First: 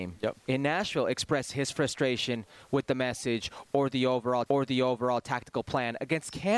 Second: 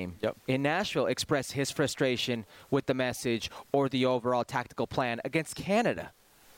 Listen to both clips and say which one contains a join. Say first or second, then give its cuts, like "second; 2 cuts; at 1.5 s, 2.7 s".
first; 1 cut; at 4.5 s